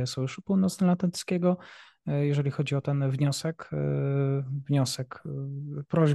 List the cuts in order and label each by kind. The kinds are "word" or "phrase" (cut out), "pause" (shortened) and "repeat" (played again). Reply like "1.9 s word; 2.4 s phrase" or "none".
none